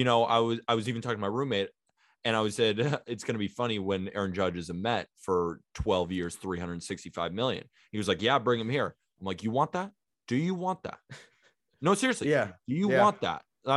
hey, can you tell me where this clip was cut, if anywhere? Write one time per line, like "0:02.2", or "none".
none